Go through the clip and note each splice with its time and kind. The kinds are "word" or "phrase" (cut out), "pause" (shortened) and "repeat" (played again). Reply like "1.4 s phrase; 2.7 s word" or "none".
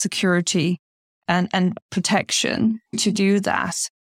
2.9 s pause